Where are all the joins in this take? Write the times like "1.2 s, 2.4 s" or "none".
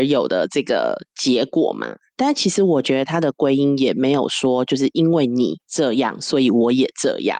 5.6 s